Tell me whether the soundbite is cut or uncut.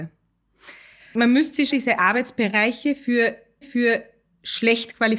cut